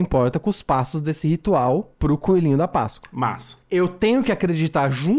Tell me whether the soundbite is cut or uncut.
uncut